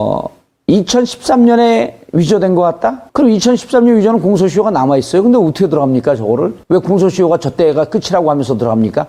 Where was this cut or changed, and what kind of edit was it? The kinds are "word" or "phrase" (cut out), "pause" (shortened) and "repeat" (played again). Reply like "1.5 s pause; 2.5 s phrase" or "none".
3.1 s pause; 6.6 s pause